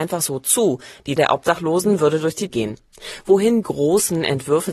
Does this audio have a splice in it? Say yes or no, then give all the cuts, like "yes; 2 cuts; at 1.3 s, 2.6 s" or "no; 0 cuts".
yes; 3 cuts; at 1.2 s, 2.5 s, 3.6 s